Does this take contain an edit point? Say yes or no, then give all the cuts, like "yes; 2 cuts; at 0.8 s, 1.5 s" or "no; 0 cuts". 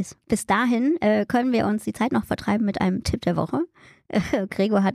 no; 0 cuts